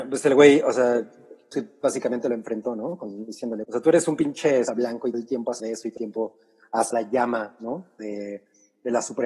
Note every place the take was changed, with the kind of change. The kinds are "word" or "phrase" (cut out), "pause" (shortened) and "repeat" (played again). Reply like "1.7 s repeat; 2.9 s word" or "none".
1.5 s word; 3.6 s word; 4.7 s word; 5.1 s word; 5.6 s word; 6.0 s word; 6.9 s word

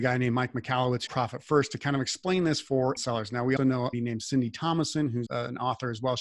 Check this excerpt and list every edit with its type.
1.1 s phrase; 3.0 s word; 3.6 s word; 3.9 s phrase; 5.3 s word

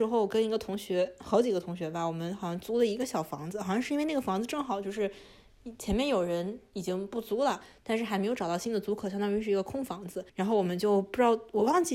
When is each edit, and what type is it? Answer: 10.3 s pause

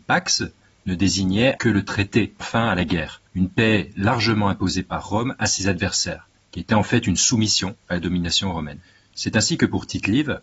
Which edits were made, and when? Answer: 1.6 s word; 2.4 s word; 3.3 s pause

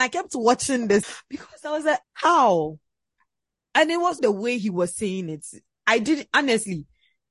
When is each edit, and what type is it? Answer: 1.0 s word; 2.0 s word; 4.2 s word

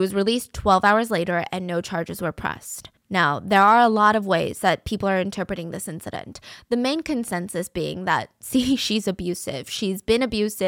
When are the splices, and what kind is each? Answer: 3.0 s pause

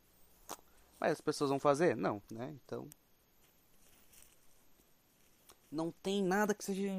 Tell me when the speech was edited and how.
2.3 s pause

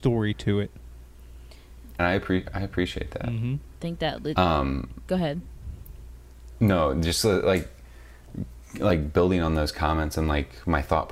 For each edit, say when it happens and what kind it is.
2.0 s word

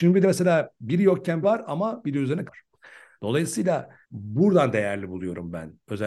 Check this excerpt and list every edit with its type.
1.4 s word; 2.5 s word; 4.0 s word

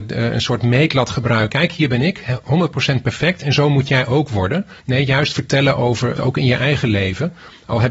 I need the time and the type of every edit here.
1.5 s word; 4.8 s pause; 6.2 s phrase

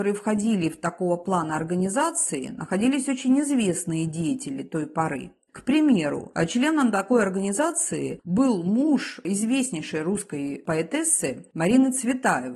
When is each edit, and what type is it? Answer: none

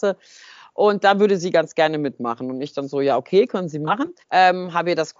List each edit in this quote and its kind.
4.2 s pause

